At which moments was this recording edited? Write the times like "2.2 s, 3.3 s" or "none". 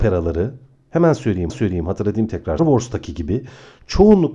1.5 s, 2.6 s